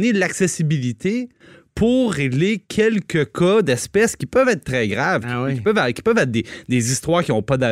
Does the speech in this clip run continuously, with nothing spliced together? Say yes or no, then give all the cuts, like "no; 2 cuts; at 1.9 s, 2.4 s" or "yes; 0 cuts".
yes; 0 cuts